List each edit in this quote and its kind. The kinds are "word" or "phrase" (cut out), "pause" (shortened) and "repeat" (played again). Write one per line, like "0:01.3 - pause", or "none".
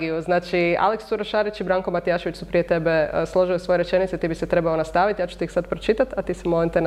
none